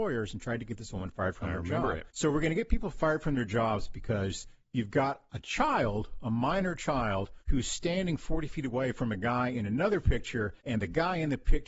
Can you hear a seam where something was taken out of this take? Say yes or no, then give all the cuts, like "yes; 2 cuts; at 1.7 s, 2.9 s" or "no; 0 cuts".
yes; 3 cuts; at 2.1 s, 7.4 s, 10.6 s